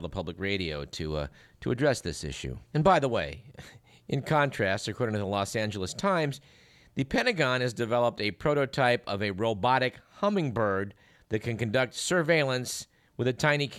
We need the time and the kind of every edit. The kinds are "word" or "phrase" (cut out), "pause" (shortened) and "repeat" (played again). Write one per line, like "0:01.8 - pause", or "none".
0:02.7 - pause